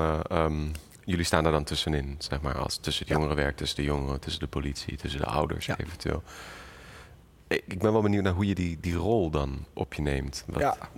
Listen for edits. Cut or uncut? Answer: uncut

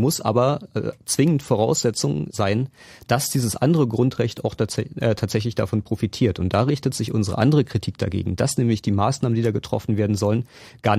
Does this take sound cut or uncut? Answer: cut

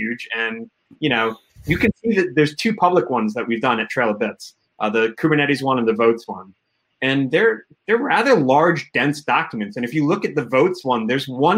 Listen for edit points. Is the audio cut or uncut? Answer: uncut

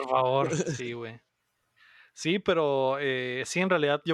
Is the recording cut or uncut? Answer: uncut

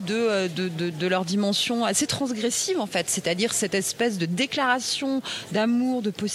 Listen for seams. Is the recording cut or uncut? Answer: uncut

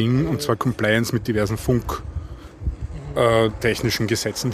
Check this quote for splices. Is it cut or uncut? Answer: uncut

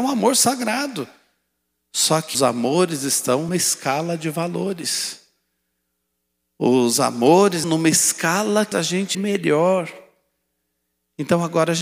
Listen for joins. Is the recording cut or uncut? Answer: cut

